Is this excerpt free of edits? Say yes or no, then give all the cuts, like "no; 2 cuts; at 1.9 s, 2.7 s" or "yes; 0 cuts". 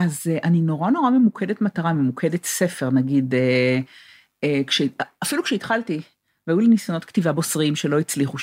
yes; 0 cuts